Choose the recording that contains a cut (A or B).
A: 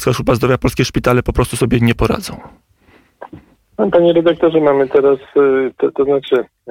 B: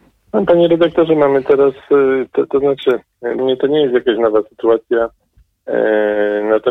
B